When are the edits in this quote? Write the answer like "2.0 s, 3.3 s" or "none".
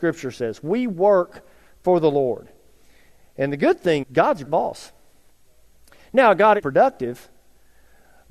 4.0 s, 4.5 s, 6.6 s

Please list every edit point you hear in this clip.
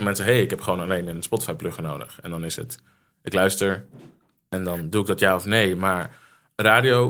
none

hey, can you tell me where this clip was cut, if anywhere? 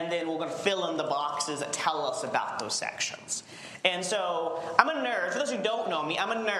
none

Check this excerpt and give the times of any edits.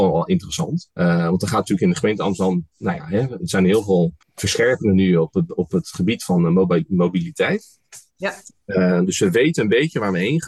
0.9 s, 4.2 s

